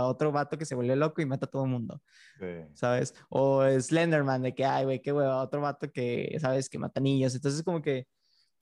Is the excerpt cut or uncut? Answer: uncut